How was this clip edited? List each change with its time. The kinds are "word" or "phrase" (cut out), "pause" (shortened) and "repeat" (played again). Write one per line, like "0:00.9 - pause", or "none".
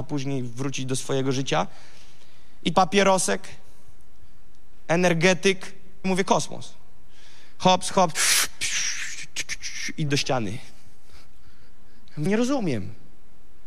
0:02.7 - word
0:06.0 - word
0:10.1 - word
0:12.3 - word